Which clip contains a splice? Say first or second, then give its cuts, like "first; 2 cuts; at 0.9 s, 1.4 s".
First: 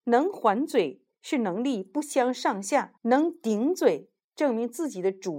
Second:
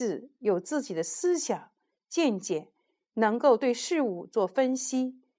first; 1 cut; at 3.0 s